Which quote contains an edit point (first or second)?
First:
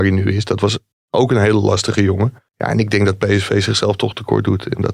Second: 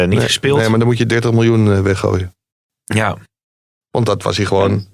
first